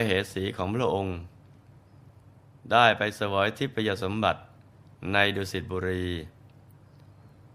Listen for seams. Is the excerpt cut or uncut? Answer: uncut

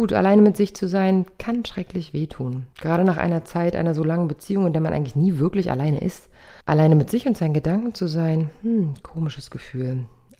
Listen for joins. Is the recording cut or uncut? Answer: cut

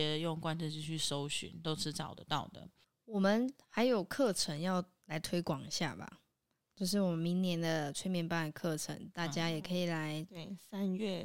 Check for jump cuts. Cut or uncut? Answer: uncut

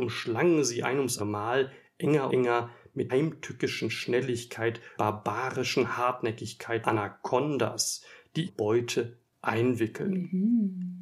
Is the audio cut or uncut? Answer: cut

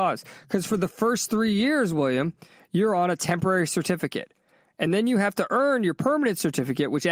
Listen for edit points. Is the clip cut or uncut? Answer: uncut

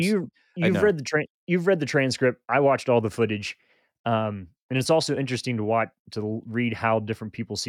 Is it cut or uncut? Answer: uncut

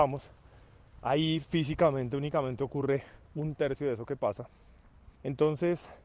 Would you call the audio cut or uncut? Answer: cut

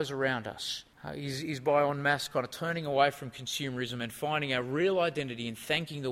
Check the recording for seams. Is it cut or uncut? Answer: cut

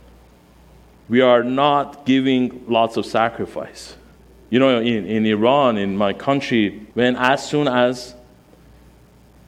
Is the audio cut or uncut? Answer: cut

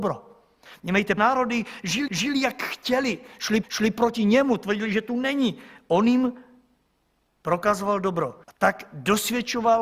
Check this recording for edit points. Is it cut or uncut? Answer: cut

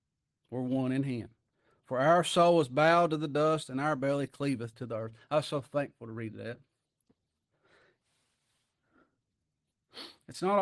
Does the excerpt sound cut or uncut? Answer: uncut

